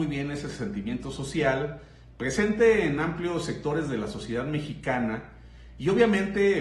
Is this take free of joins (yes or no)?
yes